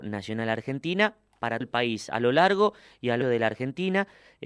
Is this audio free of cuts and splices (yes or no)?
no